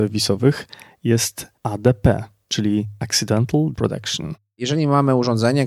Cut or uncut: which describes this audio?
cut